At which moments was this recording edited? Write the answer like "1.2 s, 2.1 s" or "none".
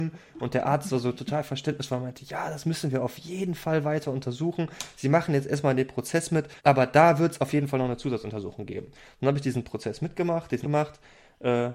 6.6 s, 10.6 s